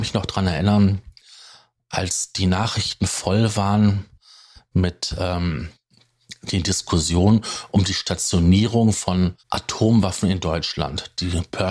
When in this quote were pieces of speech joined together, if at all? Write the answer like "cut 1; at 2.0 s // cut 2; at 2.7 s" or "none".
cut 1; at 9.4 s